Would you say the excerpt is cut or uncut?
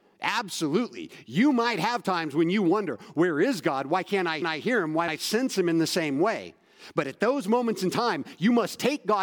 cut